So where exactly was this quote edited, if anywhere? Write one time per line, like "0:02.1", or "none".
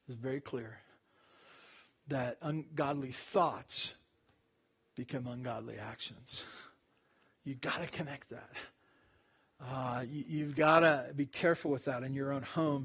none